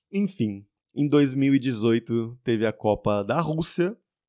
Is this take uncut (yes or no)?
yes